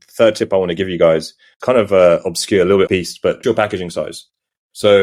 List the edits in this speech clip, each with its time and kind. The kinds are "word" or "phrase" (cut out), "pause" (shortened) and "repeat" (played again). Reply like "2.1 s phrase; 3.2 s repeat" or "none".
1.6 s word; 2.9 s word; 3.4 s word